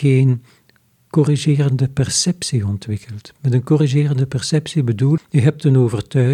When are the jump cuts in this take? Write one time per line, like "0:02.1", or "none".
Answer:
0:05.2